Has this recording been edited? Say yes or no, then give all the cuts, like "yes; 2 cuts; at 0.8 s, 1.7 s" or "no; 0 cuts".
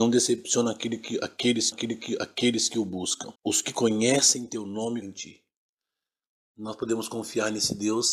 yes; 3 cuts; at 1.7 s, 3.3 s, 5.0 s